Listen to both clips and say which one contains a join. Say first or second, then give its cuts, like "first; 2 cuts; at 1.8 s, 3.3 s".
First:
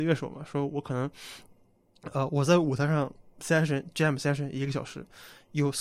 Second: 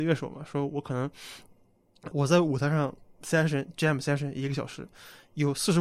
second; 1 cut; at 2.1 s